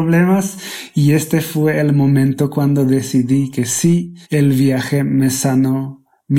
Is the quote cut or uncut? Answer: cut